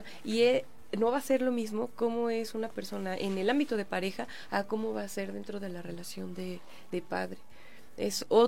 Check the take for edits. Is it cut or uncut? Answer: uncut